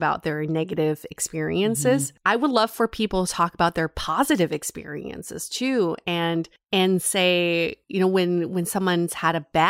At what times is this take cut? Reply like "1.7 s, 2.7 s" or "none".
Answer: none

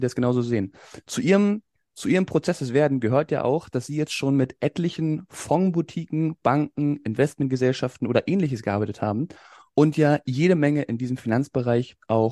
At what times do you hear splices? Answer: none

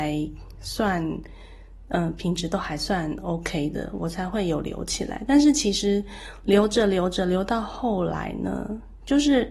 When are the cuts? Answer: none

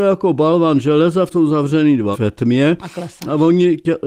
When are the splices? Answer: 1.3 s, 2.1 s

